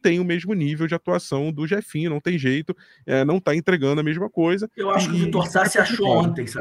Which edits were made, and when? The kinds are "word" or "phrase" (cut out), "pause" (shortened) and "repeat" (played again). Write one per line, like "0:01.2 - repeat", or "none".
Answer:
none